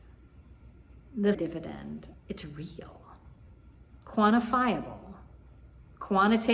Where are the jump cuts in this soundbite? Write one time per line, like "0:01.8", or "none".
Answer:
0:01.3
0:02.1